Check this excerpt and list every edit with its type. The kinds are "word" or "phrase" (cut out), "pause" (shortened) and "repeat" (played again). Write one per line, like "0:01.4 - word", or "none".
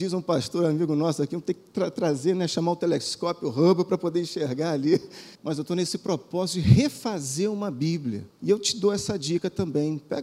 0:05.3 - pause
0:08.3 - pause

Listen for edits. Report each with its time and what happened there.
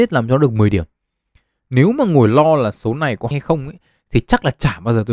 0:03.3 - word

